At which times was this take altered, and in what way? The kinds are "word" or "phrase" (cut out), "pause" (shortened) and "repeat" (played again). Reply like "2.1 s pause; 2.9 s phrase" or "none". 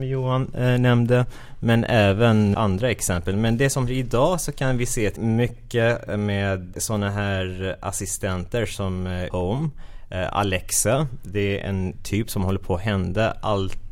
2.5 s word; 3.9 s word; 5.2 s word; 9.3 s word